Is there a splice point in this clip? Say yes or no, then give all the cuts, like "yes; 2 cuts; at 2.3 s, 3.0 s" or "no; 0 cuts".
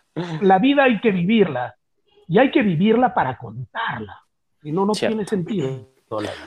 no; 0 cuts